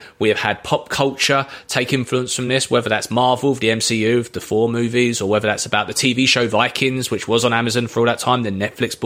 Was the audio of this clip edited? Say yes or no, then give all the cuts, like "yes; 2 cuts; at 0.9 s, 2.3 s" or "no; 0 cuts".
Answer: no; 0 cuts